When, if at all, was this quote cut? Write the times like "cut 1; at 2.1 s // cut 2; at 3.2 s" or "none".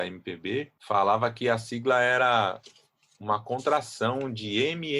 none